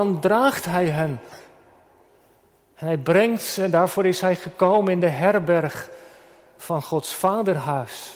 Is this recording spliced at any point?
no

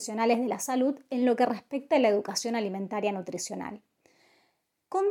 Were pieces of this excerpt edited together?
no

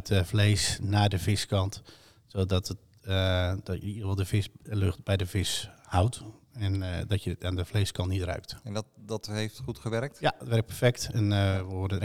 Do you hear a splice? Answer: no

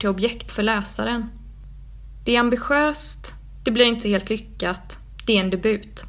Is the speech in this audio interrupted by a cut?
no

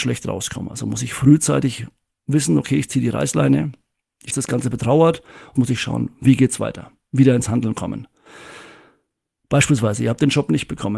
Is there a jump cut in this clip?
yes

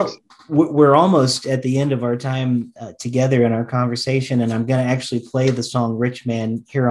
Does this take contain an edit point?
no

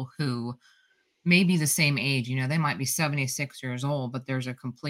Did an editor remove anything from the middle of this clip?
no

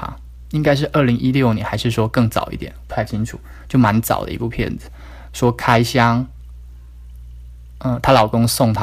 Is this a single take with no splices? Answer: yes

